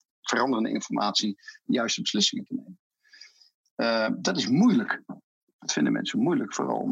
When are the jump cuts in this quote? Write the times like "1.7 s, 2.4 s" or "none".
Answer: none

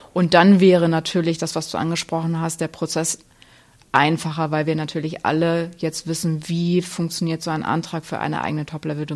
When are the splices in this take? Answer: none

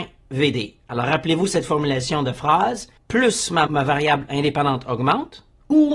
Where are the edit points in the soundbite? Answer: 3.0 s, 3.7 s, 4.3 s

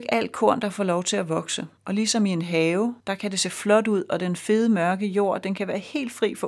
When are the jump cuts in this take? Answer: 1.8 s, 3.0 s

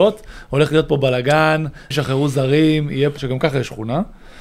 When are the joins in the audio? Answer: 1.9 s, 3.2 s

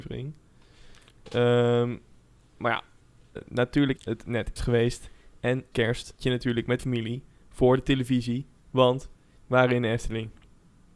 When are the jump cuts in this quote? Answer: 3.4 s, 4.0 s, 4.6 s, 5.7 s, 6.2 s, 6.8 s, 9.4 s

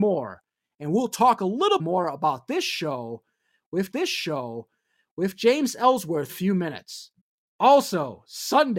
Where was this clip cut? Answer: 1.8 s, 3.9 s, 6.3 s, 7.2 s

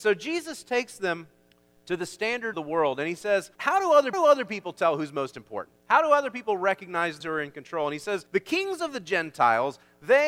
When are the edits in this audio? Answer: 1.5 s, 2.5 s, 3.6 s, 4.1 s, 5.8 s, 7.2 s, 8.3 s

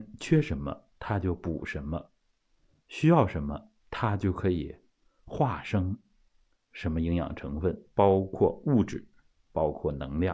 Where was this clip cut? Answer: 0.9 s, 3.8 s, 7.9 s

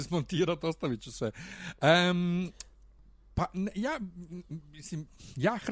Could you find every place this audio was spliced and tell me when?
none

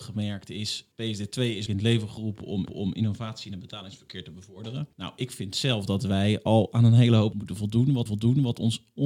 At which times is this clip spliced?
0.9 s, 1.7 s, 2.7 s, 4.9 s, 7.3 s, 8.1 s

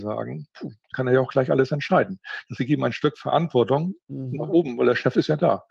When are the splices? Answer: 0.9 s, 2.6 s, 4.0 s

